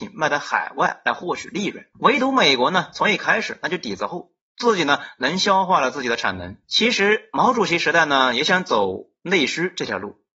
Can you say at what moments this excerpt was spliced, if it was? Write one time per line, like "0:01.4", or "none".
0:01.9
0:06.6